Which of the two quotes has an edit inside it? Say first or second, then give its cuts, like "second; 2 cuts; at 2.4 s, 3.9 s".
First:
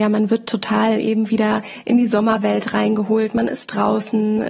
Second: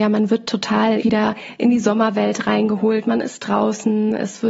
second; 1 cut; at 1.0 s